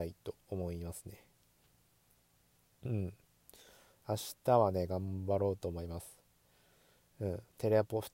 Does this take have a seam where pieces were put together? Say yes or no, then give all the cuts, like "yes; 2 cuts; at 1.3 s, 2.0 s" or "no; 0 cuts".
no; 0 cuts